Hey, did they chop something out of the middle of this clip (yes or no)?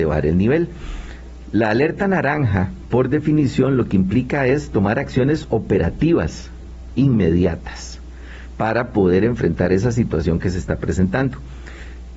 no